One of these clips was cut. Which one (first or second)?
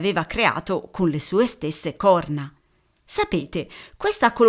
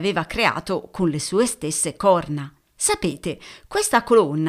second